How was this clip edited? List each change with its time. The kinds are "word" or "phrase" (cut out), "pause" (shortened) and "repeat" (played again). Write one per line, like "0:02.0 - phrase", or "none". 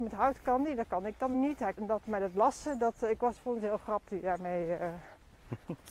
0:01.3 - word
0:01.7 - word
0:04.1 - word